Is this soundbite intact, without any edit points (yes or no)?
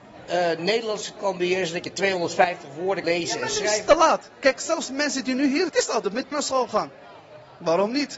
no